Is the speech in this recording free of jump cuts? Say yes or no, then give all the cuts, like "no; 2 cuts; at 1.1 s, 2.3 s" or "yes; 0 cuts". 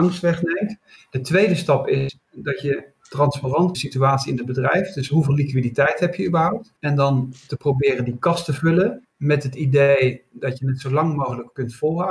no; 3 cuts; at 3.7 s, 6.8 s, 9.0 s